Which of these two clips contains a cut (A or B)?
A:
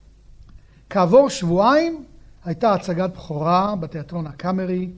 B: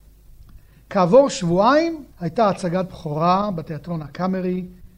B